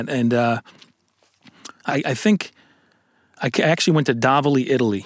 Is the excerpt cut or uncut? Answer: cut